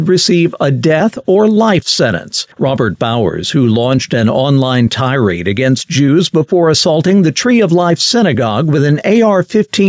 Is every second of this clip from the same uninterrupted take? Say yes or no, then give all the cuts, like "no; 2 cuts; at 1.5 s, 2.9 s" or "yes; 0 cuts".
no; 1 cut; at 2.5 s